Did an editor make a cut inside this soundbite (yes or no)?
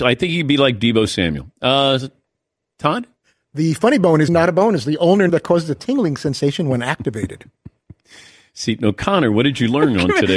yes